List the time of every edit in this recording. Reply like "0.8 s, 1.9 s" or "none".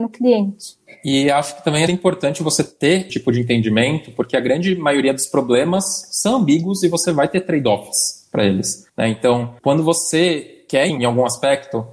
1.9 s, 3.1 s, 8.9 s, 10.9 s